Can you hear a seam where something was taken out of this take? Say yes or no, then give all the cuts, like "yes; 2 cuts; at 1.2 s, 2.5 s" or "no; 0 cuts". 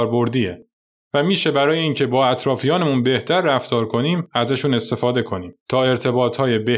yes; 1 cut; at 5.6 s